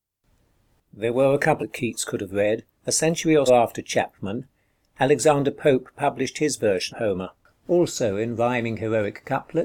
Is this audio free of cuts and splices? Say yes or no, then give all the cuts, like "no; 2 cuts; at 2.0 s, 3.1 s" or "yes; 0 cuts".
no; 4 cuts; at 1.6 s, 2.7 s, 3.5 s, 6.9 s